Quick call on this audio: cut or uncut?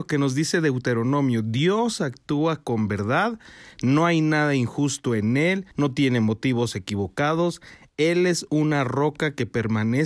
cut